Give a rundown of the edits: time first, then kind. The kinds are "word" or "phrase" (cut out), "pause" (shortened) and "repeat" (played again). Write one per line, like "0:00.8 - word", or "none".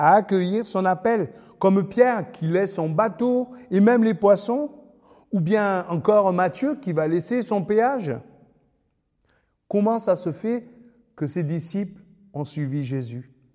none